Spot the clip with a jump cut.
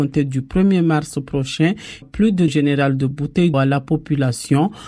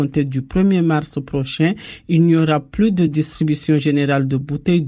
first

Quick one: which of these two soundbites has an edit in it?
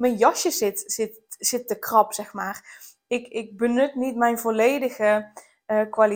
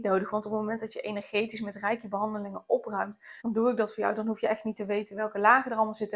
second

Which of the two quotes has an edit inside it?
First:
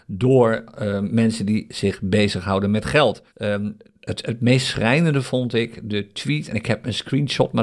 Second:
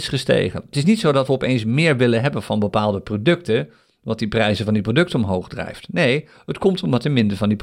first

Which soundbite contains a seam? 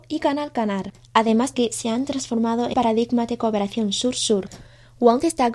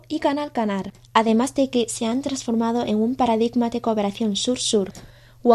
first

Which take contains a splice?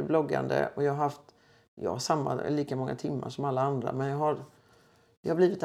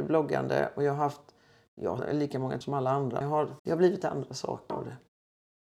second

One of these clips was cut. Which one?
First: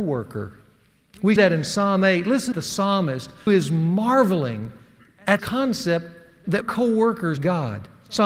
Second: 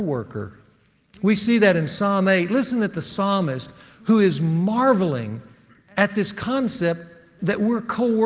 first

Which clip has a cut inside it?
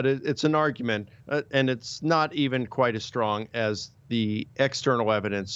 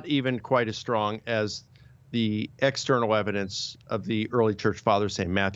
first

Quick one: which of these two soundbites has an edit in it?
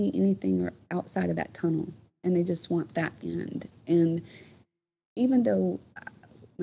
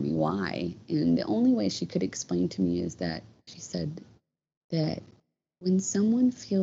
first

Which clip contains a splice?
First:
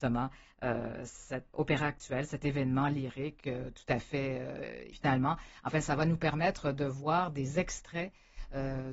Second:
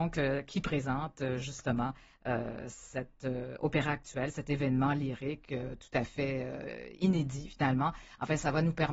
first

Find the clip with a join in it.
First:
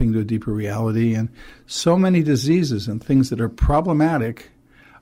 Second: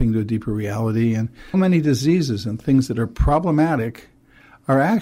second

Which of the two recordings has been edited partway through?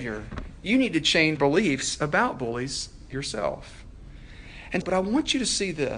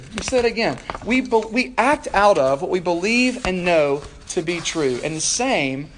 first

